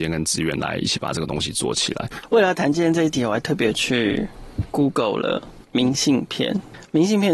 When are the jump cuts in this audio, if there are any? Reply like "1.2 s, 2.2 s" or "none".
5.6 s